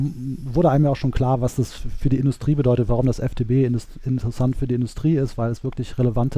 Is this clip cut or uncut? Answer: uncut